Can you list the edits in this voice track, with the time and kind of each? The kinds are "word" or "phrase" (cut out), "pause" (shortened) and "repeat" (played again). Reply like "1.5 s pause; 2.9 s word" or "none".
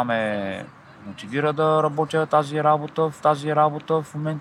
3.2 s repeat